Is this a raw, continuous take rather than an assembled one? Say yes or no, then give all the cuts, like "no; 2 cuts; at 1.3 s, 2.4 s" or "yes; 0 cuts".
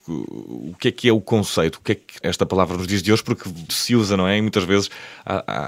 no; 2 cuts; at 2.2 s, 3.7 s